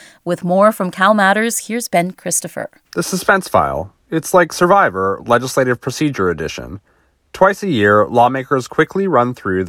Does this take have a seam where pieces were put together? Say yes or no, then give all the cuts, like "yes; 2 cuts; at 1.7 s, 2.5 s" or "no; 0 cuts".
yes; 1 cut; at 2.8 s